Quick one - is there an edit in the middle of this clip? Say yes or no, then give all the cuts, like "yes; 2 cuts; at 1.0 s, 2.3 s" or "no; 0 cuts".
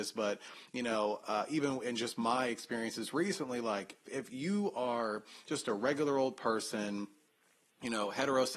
yes; 1 cut; at 4.1 s